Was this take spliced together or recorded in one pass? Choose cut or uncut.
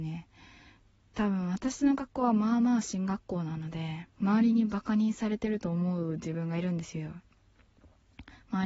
cut